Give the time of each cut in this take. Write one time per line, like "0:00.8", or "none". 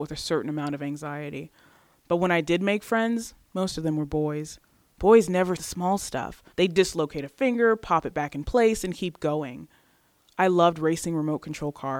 0:05.6
0:06.5